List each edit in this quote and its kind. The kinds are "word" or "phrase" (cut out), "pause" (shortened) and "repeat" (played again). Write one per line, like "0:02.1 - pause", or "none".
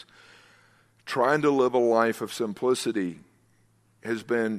none